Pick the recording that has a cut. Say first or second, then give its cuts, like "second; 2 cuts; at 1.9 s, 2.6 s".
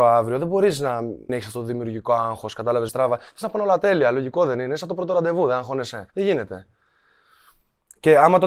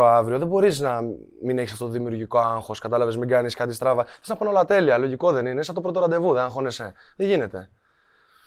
first; 3 cuts; at 1.3 s, 2.9 s, 6.1 s